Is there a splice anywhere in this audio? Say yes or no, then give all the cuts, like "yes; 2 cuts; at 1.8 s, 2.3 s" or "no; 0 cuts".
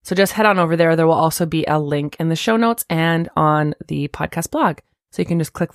no; 0 cuts